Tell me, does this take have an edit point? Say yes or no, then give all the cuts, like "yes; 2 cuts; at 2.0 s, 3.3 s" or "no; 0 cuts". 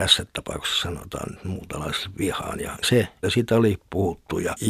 yes; 2 cuts; at 2.8 s, 3.2 s